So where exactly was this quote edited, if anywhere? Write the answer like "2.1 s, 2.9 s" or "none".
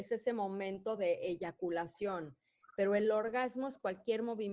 none